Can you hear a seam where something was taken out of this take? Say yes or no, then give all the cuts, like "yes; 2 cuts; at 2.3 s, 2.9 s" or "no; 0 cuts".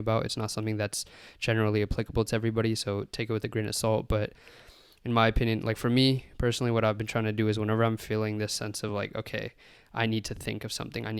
no; 0 cuts